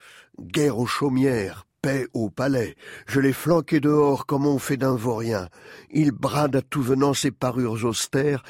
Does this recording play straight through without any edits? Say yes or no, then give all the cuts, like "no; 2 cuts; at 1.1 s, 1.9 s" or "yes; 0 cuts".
yes; 0 cuts